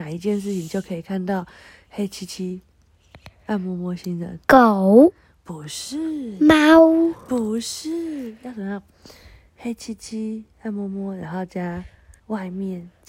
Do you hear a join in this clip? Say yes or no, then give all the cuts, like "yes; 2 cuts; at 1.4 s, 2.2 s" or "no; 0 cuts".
yes; 2 cuts; at 4.4 s, 12.2 s